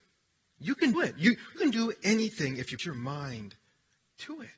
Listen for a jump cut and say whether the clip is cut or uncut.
cut